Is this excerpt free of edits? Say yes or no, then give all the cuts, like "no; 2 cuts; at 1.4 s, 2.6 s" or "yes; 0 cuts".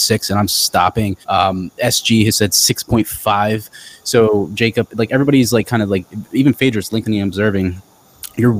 no; 1 cut; at 1.2 s